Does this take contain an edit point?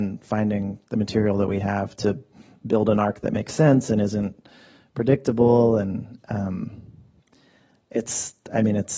no; 0 cuts

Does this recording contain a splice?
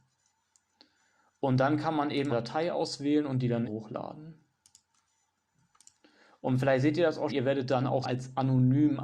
yes; 4 cuts; at 2.3 s, 3.6 s, 7.3 s, 8.0 s

